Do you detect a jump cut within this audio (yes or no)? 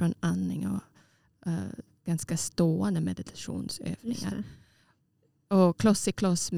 no